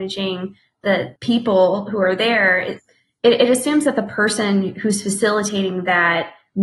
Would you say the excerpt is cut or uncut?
uncut